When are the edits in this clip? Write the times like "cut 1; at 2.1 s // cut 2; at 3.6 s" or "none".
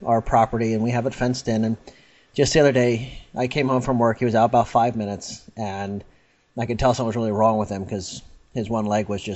none